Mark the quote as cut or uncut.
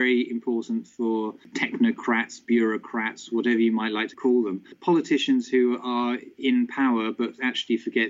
uncut